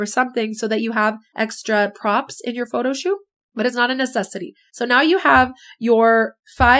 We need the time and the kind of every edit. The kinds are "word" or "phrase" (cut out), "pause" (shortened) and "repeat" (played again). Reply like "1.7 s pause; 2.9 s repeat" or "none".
none